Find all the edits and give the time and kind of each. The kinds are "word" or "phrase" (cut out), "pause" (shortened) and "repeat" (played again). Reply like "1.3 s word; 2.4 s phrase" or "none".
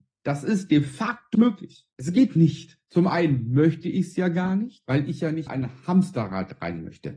1.3 s word; 5.5 s word